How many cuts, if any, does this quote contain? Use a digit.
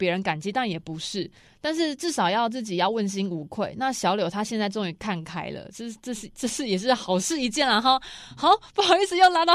0